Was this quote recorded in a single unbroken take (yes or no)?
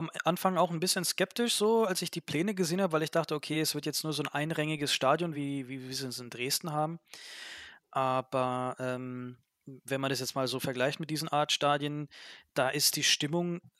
yes